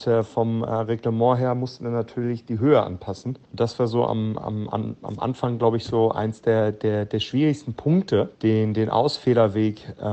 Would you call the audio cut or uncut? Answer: cut